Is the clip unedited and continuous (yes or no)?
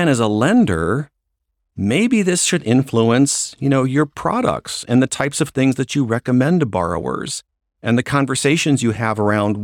yes